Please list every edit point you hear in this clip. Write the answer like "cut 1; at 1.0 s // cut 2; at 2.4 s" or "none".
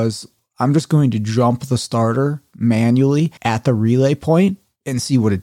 cut 1; at 3.4 s